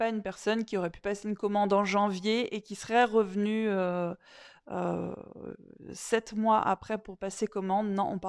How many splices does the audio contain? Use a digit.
0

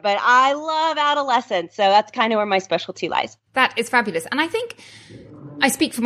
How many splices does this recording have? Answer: 1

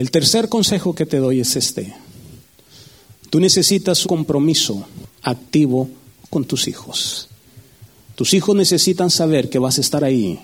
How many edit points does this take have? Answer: 1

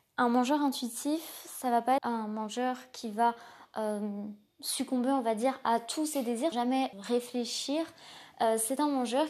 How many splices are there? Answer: 3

